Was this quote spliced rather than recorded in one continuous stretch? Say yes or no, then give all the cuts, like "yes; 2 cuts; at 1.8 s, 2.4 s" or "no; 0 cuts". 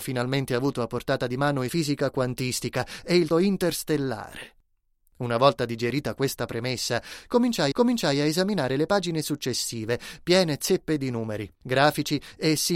yes; 3 cuts; at 1.7 s, 3.3 s, 7.7 s